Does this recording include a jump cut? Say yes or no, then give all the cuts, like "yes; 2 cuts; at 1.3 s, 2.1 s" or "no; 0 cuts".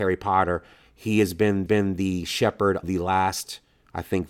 yes; 2 cuts; at 1.7 s, 2.8 s